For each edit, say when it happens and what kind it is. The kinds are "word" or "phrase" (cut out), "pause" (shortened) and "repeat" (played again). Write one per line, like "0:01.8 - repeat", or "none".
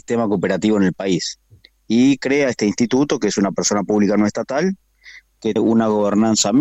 0:05.6 - word